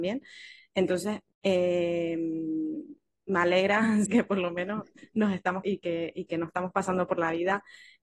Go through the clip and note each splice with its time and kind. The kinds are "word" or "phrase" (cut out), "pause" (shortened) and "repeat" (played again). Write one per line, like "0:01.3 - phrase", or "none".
0:01.3 - pause
0:04.1 - word
0:05.6 - word